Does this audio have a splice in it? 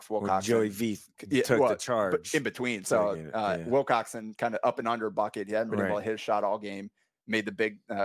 no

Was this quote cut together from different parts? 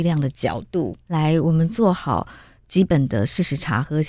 no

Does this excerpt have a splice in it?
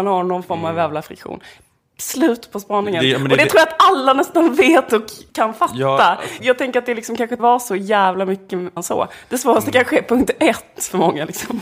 yes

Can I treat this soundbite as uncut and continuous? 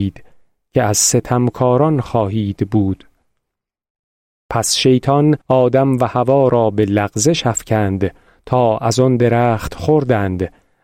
no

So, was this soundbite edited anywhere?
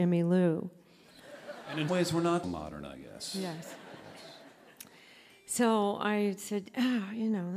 yes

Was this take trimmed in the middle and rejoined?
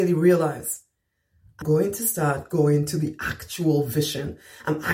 yes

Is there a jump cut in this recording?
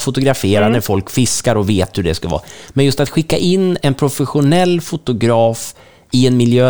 yes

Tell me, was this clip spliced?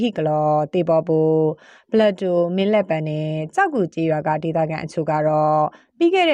no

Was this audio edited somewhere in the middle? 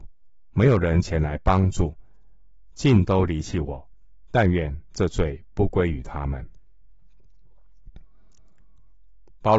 yes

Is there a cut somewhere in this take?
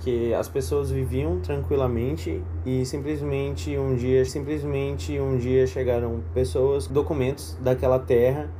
yes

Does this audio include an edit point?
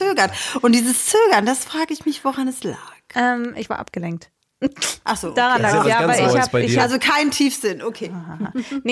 no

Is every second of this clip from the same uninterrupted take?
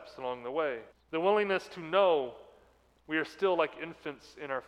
no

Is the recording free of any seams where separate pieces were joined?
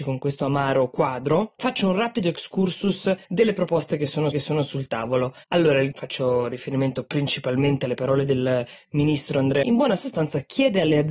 no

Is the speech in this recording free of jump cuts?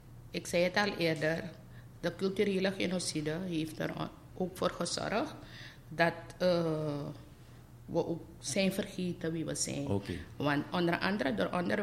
yes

